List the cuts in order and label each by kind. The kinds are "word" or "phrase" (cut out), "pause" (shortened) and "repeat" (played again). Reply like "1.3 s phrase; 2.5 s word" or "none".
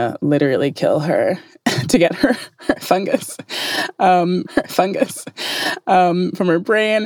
4.4 s repeat